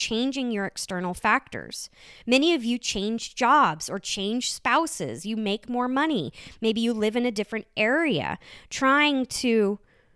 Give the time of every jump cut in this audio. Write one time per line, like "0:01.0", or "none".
none